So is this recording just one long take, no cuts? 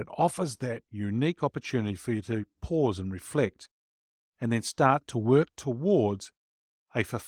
yes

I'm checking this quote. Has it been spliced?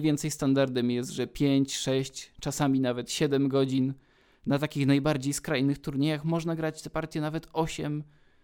no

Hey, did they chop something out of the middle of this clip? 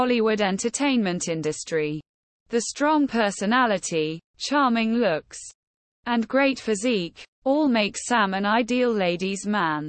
no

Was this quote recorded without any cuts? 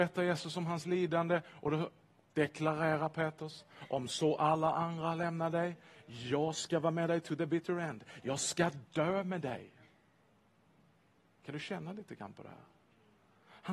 yes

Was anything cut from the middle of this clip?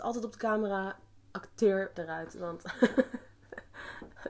yes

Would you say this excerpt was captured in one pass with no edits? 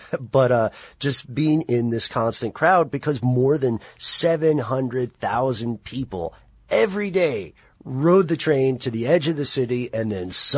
yes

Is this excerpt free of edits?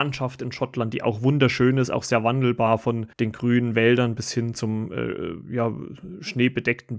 no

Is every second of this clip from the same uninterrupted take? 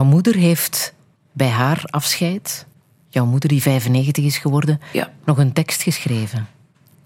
yes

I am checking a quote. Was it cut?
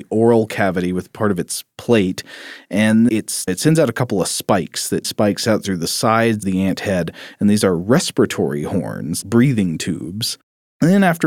yes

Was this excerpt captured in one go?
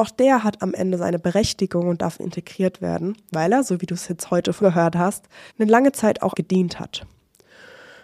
no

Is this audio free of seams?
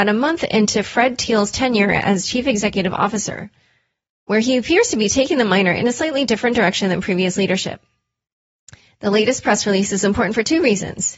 yes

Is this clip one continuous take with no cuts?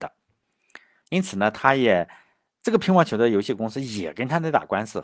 yes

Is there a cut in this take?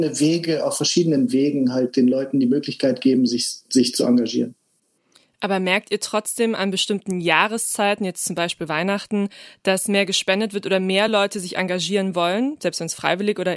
no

